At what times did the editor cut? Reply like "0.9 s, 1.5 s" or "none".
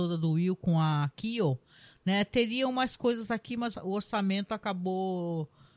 none